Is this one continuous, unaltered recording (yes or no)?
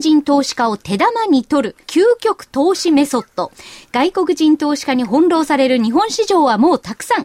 no